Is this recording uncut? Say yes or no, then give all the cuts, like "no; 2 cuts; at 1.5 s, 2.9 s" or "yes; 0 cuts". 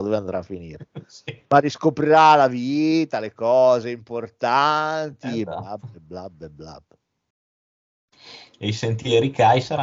yes; 0 cuts